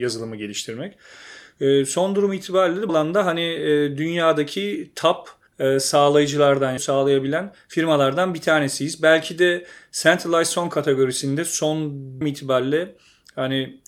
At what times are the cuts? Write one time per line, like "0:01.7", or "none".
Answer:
0:02.9
0:05.5
0:06.8
0:12.2